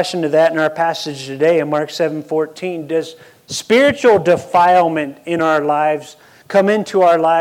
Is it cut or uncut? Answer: uncut